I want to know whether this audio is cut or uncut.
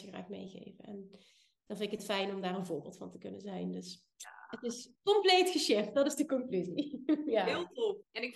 uncut